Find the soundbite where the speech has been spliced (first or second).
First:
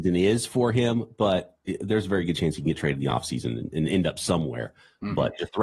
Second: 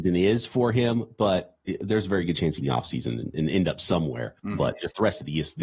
second